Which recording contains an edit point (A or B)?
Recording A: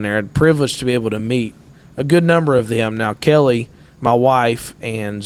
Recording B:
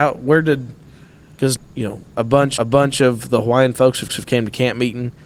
B